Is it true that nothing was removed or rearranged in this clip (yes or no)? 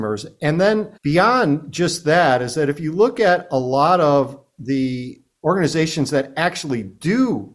no